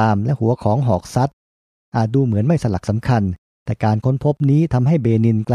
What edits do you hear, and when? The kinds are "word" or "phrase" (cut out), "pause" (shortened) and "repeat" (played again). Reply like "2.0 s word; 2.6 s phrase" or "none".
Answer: none